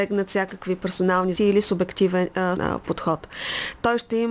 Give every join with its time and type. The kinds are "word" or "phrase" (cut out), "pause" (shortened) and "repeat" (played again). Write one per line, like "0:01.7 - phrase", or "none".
0:01.4 - word
0:02.6 - word